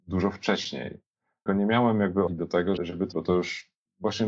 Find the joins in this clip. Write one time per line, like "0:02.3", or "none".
0:01.5
0:02.3
0:02.8
0:03.1